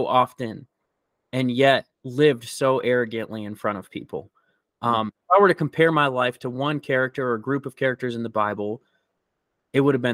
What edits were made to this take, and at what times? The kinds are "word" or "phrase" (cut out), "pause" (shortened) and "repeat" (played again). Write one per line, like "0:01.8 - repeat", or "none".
0:01.9 - pause